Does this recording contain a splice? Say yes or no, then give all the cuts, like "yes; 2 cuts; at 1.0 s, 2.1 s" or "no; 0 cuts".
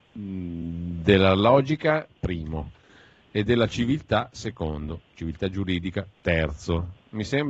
no; 0 cuts